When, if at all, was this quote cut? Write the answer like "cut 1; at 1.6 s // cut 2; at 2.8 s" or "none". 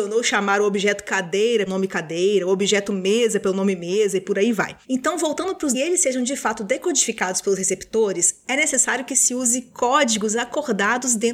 cut 1; at 1.7 s // cut 2; at 4.8 s // cut 3; at 5.7 s